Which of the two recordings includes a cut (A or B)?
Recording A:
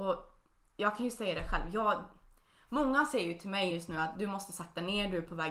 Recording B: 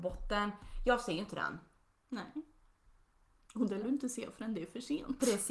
B